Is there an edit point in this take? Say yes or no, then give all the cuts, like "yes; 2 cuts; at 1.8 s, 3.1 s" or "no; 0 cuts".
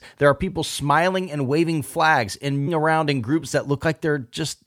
yes; 1 cut; at 2.7 s